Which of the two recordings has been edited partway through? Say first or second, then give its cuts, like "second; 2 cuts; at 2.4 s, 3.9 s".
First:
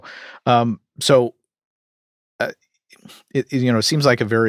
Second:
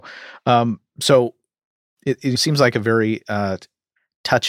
second; 2 cuts; at 2.0 s, 2.4 s